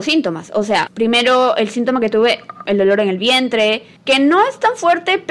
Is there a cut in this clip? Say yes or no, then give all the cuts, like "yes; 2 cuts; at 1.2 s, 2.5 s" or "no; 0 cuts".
no; 0 cuts